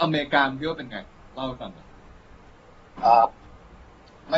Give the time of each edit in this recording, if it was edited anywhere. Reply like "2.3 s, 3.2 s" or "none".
1.3 s